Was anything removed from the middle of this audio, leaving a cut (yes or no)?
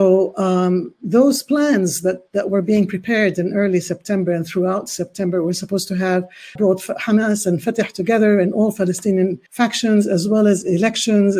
yes